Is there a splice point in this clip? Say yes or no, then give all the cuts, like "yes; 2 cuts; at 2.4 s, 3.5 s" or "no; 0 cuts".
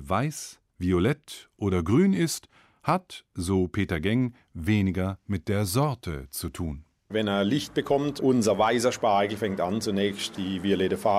no; 0 cuts